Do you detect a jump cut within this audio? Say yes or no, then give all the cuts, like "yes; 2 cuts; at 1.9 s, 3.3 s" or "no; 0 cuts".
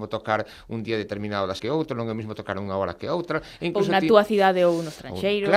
yes; 1 cut; at 1.6 s